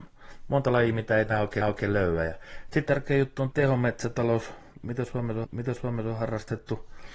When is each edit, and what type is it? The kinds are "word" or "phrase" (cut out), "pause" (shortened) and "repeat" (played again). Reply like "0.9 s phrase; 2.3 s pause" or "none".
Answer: 1.3 s word; 1.6 s repeat; 2.9 s phrase; 3.5 s word; 5.4 s repeat